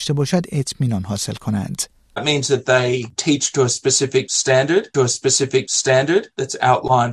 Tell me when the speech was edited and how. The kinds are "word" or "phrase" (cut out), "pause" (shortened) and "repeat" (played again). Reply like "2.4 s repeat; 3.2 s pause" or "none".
4.9 s repeat